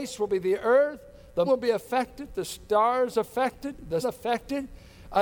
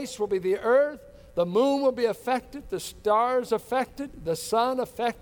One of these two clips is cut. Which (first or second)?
first